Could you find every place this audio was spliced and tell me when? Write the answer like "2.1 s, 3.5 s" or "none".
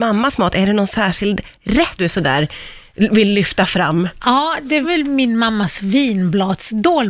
2.0 s, 4.8 s